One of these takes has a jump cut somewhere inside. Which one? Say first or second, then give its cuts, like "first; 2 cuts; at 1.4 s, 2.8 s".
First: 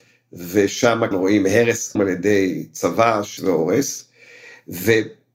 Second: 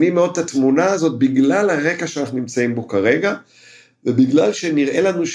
first; 3 cuts; at 1.1 s, 2.0 s, 3.4 s